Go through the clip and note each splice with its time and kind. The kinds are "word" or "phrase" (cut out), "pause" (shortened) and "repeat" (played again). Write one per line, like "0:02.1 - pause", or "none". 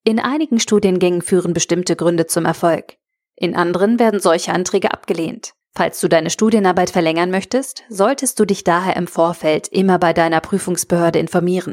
0:05.6 - pause